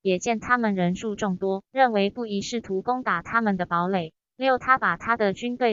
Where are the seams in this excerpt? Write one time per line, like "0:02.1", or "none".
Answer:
0:01.7